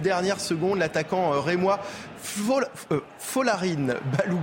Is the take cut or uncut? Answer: uncut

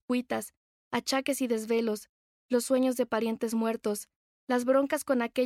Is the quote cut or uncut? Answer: uncut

